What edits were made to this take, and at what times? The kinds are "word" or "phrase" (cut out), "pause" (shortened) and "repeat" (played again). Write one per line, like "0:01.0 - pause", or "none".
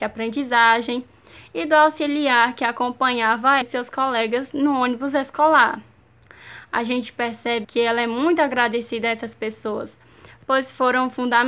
0:03.6 - word
0:07.6 - word